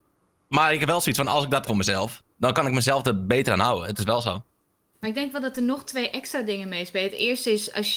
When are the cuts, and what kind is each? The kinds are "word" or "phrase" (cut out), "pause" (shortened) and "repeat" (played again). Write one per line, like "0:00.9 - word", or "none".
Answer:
0:01.7 - phrase
0:04.6 - pause